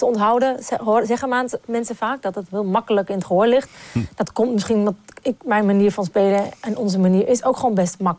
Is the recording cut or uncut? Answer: uncut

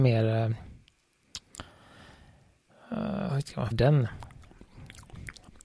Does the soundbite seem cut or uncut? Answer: cut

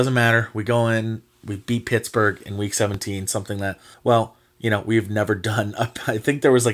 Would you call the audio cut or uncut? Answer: cut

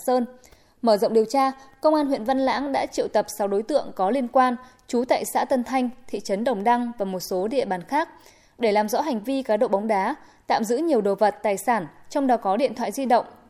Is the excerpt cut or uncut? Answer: uncut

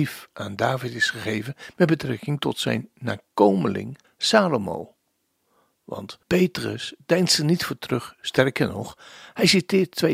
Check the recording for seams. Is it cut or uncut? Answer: cut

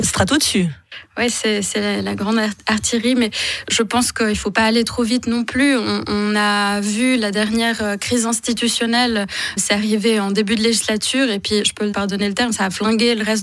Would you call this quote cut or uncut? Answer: cut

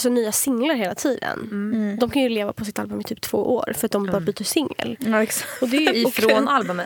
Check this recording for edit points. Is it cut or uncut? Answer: uncut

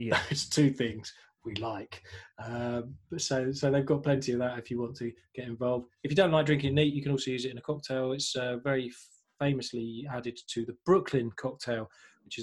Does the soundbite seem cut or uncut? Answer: uncut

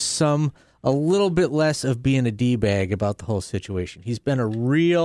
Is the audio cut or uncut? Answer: uncut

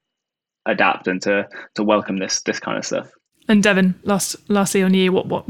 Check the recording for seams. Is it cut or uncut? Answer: uncut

